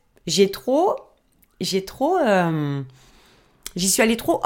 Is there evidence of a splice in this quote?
no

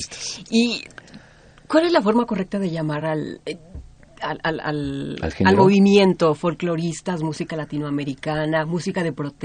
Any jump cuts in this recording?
no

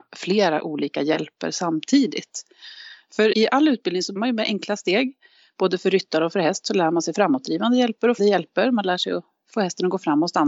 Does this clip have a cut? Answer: yes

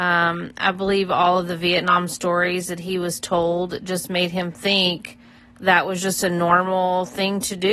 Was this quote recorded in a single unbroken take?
yes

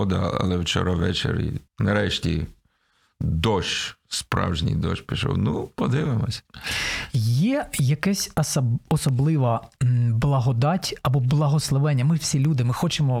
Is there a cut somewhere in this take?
yes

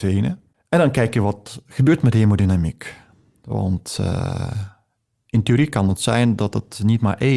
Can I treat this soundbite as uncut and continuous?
yes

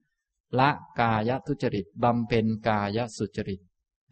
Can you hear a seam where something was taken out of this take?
no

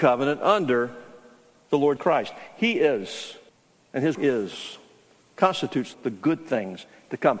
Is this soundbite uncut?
no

